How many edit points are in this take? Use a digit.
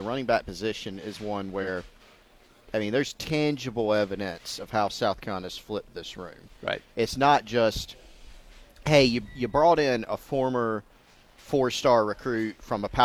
0